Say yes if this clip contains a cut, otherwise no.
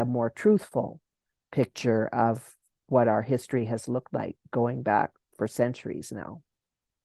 no